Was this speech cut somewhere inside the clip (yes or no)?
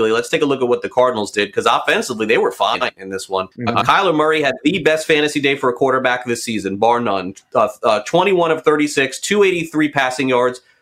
yes